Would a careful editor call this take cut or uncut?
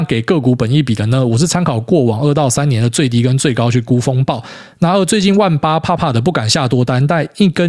uncut